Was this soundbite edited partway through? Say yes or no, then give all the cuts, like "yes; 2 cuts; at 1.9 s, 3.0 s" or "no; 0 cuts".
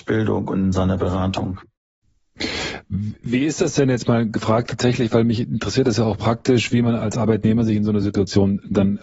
no; 0 cuts